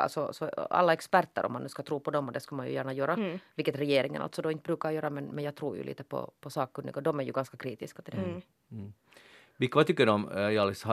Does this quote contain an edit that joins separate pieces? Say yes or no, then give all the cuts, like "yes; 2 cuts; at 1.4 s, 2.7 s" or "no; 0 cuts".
no; 0 cuts